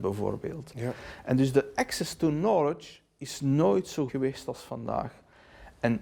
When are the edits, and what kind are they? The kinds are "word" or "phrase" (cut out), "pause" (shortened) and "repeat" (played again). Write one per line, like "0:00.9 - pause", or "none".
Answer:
0:04.1 - word

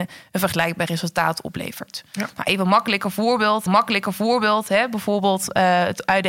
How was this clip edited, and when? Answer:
0:03.7 - repeat

